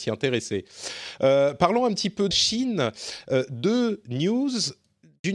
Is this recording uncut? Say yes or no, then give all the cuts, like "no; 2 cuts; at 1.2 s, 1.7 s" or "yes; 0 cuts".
no; 1 cut; at 2.3 s